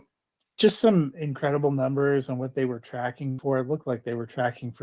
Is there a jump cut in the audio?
no; 0 cuts

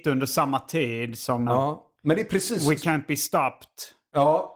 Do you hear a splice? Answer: yes; 1 cut; at 1.5 s

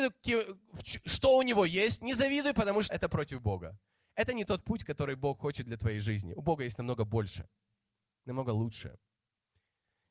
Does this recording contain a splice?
yes; 1 cut; at 2.9 s

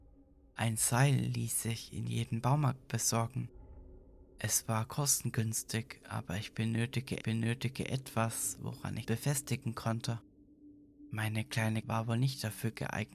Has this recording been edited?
yes; 3 cuts; at 7.2 s, 9.0 s, 11.8 s

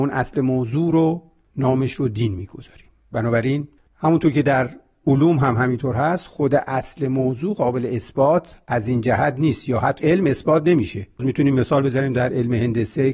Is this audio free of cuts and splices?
no; 3 cuts; at 3.8 s, 10.0 s, 11.2 s

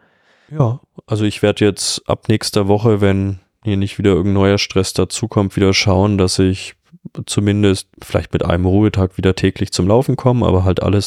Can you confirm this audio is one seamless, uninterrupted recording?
no; 1 cut; at 7.9 s

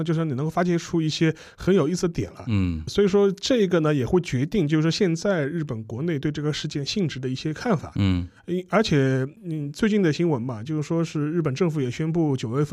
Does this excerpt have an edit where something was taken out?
yes; 2 cuts; at 2.9 s, 9.4 s

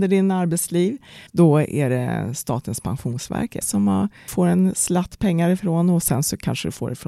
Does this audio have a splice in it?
yes; 3 cuts; at 1.3 s, 3.6 s, 4.3 s

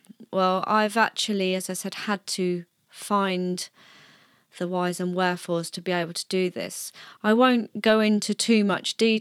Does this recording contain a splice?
no; 0 cuts

